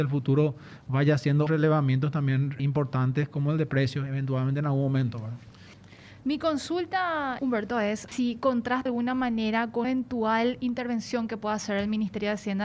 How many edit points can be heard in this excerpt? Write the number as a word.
six